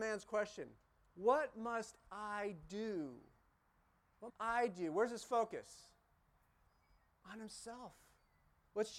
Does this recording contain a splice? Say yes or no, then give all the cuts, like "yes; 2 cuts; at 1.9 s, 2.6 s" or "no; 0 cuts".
yes; 1 cut; at 4.3 s